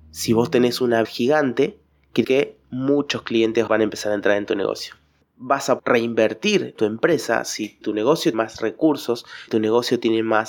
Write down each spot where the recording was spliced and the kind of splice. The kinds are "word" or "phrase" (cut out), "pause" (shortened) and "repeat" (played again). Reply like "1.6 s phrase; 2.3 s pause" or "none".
1.0 s word; 2.2 s word; 3.7 s word; 5.8 s word; 6.7 s word; 7.8 s word; 8.3 s word; 9.5 s word